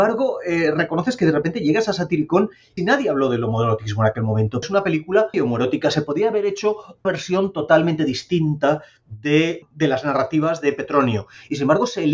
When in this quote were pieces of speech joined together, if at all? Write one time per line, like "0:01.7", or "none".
0:02.8
0:04.6
0:05.3
0:07.0
0:09.6

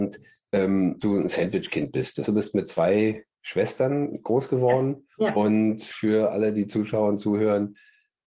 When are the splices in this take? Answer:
0:01.0
0:02.3
0:05.1
0:05.9

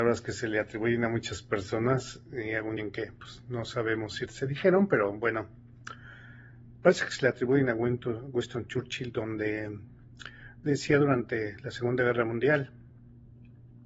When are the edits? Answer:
0:02.8
0:04.3

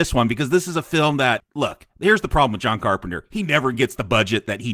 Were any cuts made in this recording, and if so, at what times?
none

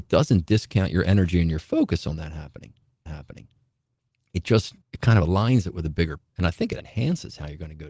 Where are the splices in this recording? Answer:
0:03.1
0:04.8
0:06.2
0:06.8

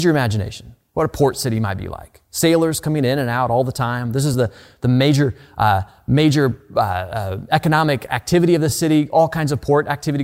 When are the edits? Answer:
none

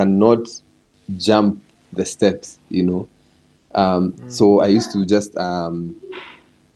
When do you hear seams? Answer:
none

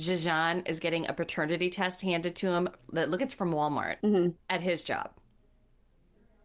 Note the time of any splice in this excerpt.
0:03.2
0:04.0

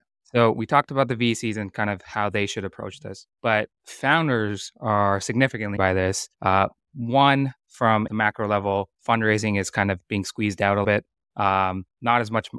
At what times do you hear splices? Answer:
0:03.3
0:05.8
0:06.3
0:08.1
0:09.0
0:10.0
0:10.8

